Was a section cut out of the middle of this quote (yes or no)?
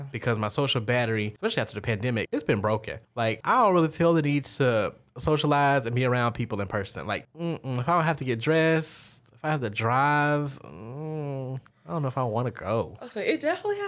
no